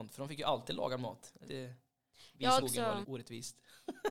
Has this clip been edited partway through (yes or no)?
yes